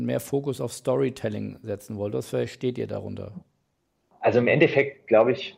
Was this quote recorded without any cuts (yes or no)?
yes